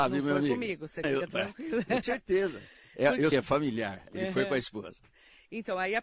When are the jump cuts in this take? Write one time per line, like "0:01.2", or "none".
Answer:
0:01.0
0:02.0
0:03.3